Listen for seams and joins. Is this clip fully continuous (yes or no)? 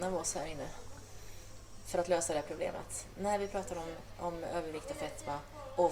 yes